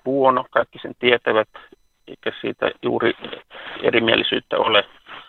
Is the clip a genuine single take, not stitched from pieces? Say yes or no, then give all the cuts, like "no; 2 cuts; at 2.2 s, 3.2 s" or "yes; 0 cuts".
yes; 0 cuts